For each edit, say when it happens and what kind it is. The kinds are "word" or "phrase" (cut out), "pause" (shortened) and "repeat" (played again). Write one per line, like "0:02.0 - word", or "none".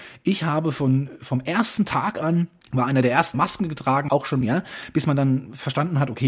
0:02.6 - pause
0:03.3 - word
0:04.1 - word
0:04.4 - phrase